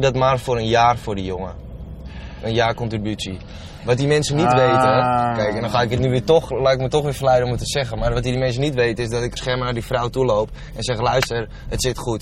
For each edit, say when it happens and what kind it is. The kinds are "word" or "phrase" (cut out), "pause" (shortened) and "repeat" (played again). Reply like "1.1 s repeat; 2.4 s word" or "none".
9.4 s phrase